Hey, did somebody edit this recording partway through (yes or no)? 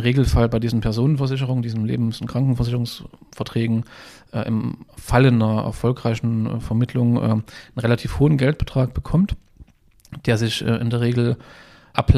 no